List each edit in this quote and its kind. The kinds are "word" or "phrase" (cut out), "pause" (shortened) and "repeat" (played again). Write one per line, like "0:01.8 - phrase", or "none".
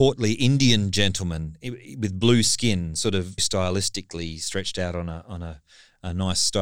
0:03.4 - word